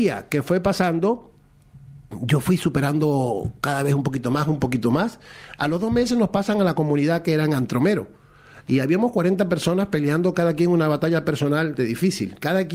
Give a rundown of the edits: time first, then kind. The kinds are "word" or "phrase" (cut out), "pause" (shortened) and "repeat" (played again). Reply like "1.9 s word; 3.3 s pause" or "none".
11.8 s word